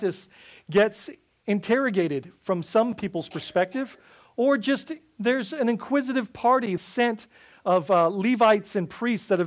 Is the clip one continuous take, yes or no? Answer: no